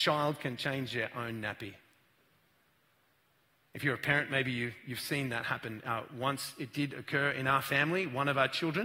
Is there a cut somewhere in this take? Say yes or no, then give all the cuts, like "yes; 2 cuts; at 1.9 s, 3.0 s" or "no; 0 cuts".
no; 0 cuts